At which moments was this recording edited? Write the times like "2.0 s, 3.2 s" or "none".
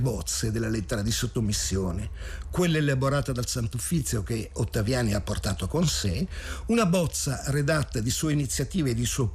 none